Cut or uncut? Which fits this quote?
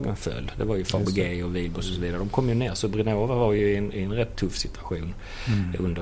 uncut